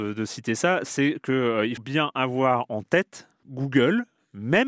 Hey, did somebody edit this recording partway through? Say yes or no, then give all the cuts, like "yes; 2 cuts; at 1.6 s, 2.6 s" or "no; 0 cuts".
yes; 2 cuts; at 1.8 s, 3.4 s